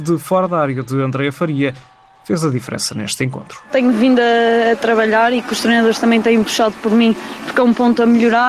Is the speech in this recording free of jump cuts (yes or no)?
yes